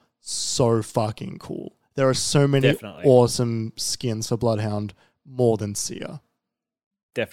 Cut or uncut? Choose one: uncut